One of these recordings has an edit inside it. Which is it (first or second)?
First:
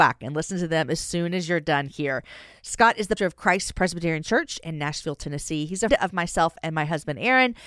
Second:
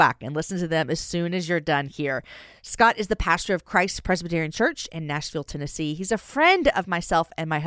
first